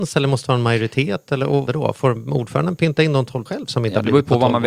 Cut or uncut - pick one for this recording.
cut